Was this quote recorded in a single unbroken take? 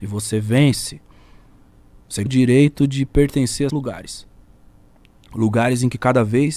no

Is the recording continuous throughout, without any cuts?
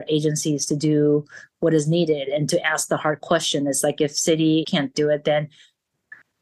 no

